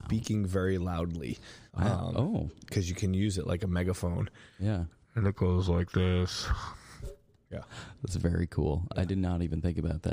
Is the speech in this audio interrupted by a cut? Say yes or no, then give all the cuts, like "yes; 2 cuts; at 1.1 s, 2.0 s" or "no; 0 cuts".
yes; 1 cut; at 1.7 s